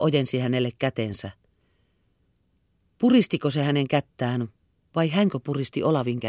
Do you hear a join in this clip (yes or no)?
no